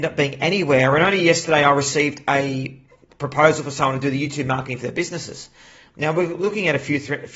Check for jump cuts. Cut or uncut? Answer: uncut